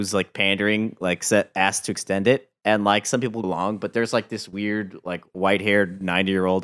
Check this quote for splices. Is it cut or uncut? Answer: cut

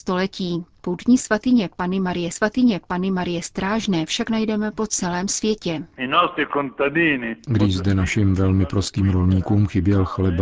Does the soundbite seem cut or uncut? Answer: cut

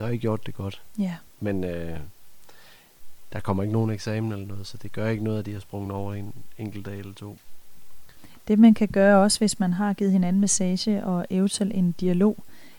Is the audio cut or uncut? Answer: uncut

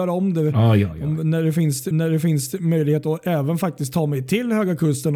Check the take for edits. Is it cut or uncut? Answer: cut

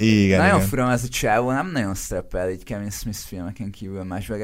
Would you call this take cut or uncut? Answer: uncut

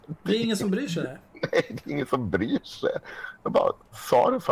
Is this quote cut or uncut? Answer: uncut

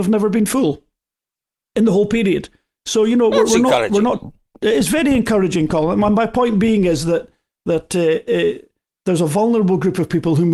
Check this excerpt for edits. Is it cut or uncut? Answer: uncut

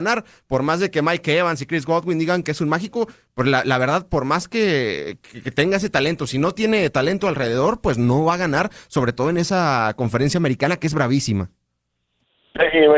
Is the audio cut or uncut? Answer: uncut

